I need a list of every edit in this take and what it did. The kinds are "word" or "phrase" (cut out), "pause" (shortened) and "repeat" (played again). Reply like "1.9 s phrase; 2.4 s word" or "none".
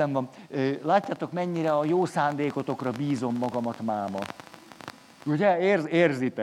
none